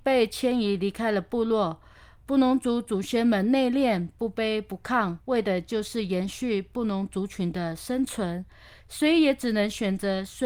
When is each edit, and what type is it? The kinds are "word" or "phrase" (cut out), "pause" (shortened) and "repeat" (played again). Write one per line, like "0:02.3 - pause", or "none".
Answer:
0:05.2 - pause